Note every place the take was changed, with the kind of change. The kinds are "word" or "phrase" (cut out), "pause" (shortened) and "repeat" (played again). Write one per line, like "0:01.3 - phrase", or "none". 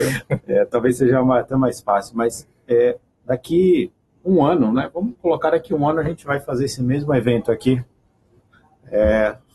none